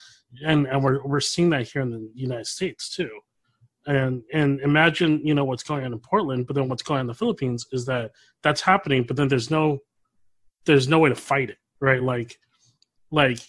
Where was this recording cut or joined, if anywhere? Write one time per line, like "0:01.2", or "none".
none